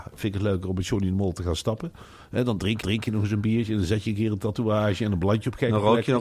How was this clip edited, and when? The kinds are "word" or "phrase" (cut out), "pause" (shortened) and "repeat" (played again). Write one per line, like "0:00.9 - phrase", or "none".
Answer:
0:02.8 - repeat